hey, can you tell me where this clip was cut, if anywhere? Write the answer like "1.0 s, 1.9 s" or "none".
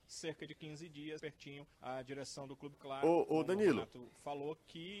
1.2 s, 1.7 s, 2.7 s